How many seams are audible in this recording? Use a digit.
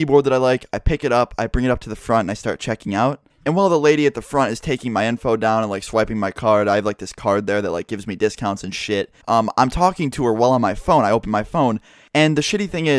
1